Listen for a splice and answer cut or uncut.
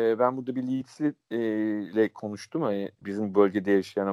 cut